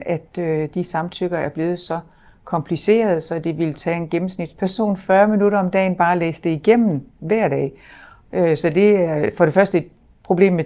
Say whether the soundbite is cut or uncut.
uncut